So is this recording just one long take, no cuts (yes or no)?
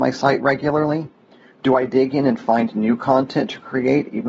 yes